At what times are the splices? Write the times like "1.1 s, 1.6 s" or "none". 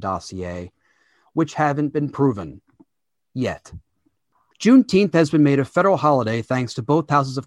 none